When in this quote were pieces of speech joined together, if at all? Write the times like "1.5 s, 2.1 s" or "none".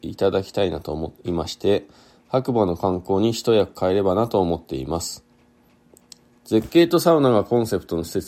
none